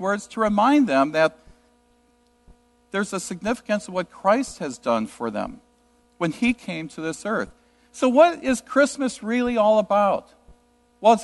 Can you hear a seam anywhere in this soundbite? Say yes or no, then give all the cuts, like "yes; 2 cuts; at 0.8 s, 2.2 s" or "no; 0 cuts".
no; 0 cuts